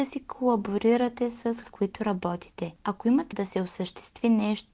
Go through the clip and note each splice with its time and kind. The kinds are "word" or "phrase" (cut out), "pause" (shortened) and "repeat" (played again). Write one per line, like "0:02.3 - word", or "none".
0:01.6 - word
0:03.3 - word